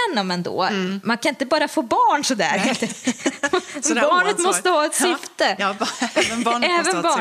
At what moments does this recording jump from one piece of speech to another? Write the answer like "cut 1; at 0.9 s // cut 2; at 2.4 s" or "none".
none